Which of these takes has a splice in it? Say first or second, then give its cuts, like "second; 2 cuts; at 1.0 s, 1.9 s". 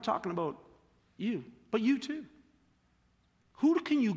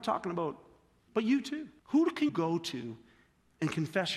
second; 3 cuts; at 1.1 s, 1.8 s, 2.3 s